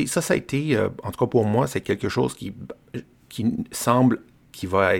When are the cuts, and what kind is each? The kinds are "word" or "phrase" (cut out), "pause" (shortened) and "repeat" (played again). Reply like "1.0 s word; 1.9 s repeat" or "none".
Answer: none